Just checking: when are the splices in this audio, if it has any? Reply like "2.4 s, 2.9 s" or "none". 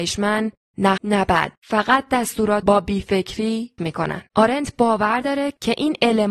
1.0 s, 1.5 s, 2.6 s, 3.8 s, 4.3 s